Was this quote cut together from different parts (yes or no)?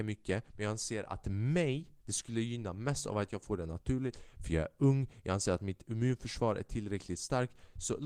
yes